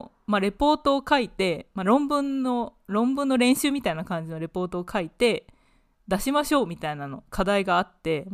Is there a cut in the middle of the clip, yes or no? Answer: no